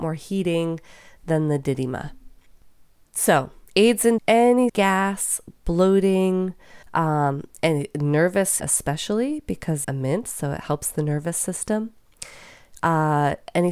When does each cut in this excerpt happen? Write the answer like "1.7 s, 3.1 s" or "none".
3.7 s, 4.2 s, 4.7 s, 6.8 s, 8.6 s, 9.8 s